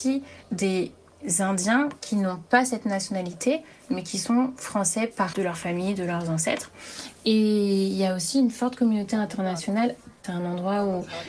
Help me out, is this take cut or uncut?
cut